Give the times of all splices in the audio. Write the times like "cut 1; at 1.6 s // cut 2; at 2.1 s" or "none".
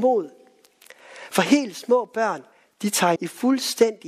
cut 1; at 2.5 s // cut 2; at 3.2 s